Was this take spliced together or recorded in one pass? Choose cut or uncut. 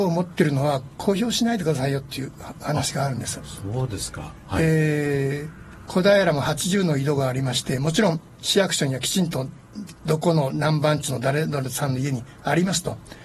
uncut